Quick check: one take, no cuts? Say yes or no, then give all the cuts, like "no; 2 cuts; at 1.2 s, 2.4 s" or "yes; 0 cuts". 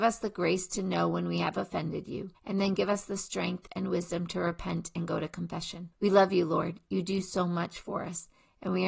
no; 2 cuts; at 2.3 s, 5.9 s